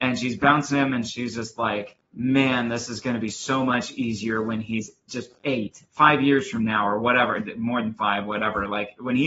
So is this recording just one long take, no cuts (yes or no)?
no